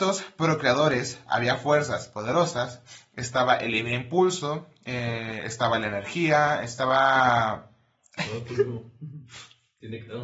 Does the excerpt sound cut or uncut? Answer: uncut